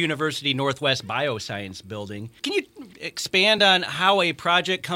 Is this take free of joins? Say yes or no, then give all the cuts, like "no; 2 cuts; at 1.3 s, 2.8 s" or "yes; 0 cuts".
yes; 0 cuts